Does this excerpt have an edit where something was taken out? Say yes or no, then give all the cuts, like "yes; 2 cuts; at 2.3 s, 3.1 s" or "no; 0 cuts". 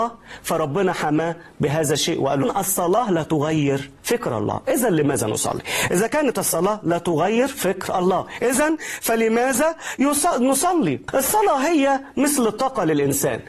yes; 2 cuts; at 2.4 s, 4.0 s